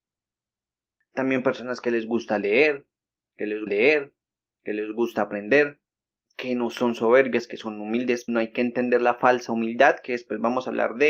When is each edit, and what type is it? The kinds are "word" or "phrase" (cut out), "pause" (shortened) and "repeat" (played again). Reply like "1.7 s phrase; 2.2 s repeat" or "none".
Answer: 3.7 s repeat; 5.9 s pause; 8.3 s word